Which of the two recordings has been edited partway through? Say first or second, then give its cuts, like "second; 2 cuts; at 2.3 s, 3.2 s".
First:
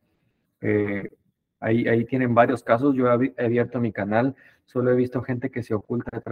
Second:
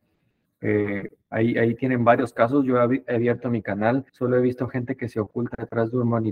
second; 2 cuts; at 1.2 s, 4.1 s